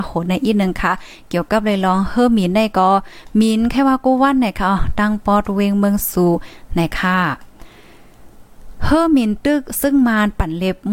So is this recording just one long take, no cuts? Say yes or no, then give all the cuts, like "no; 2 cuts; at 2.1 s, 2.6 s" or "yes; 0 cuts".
yes; 0 cuts